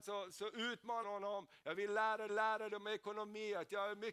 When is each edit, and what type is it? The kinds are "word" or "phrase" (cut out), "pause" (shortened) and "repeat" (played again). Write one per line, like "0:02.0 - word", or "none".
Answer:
0:01.0 - word
0:02.3 - repeat